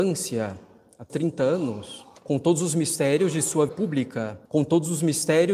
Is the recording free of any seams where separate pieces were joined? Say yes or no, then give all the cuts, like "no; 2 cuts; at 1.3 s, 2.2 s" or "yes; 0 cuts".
no; 4 cuts; at 1.1 s, 2.2 s, 3.7 s, 4.5 s